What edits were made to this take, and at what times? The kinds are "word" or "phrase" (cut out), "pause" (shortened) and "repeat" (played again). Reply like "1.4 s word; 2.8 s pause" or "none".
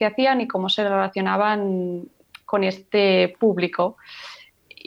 none